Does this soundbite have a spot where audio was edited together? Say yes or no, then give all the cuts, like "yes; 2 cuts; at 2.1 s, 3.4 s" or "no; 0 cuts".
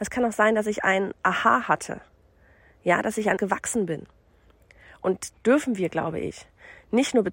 yes; 2 cuts; at 3.4 s, 5.3 s